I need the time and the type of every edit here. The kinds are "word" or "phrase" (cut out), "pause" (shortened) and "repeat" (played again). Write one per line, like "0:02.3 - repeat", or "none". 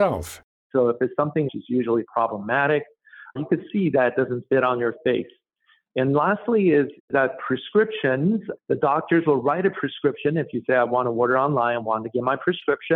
0:01.5 - phrase